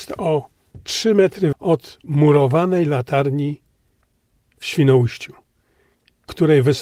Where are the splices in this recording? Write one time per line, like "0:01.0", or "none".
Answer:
0:01.5